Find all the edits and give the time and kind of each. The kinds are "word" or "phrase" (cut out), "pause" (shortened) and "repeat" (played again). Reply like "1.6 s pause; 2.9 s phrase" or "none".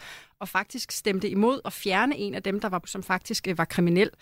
2.8 s word